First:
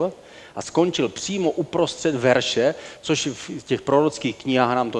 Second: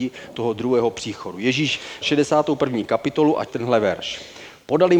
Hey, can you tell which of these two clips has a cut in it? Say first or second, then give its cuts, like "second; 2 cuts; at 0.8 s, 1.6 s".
second; 2 cuts; at 2.0 s, 3.5 s